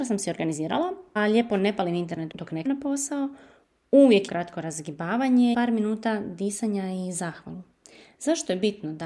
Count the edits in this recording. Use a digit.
5